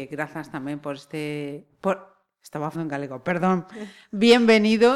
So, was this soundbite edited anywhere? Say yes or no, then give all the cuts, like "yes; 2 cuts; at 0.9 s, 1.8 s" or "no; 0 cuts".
yes; 1 cut; at 2.7 s